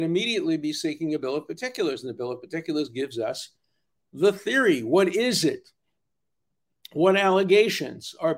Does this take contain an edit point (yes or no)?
no